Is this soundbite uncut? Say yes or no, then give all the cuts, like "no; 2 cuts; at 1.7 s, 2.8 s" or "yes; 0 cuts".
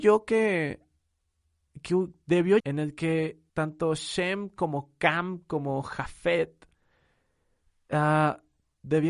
no; 2 cuts; at 2.6 s, 3.5 s